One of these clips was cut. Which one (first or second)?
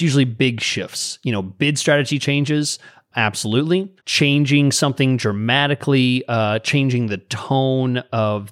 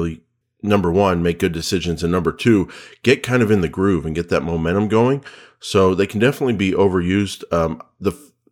first